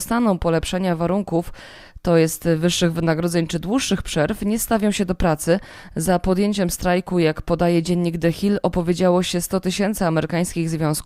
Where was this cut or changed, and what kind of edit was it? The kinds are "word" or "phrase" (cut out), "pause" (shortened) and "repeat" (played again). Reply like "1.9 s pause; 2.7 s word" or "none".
none